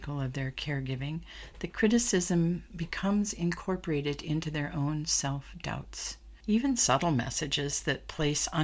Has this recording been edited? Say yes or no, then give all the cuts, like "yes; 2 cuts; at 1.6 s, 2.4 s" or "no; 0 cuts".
no; 0 cuts